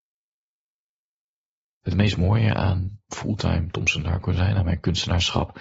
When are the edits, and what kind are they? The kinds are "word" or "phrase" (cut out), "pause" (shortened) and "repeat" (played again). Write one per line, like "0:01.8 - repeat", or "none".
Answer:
0:03.1 - pause